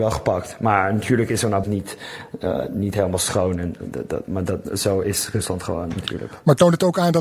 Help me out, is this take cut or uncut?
cut